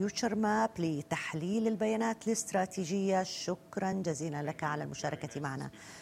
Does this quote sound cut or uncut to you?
uncut